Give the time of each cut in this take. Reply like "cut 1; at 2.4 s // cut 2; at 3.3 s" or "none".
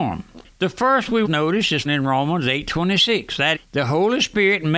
cut 1; at 1.2 s // cut 2; at 1.8 s // cut 3; at 3.5 s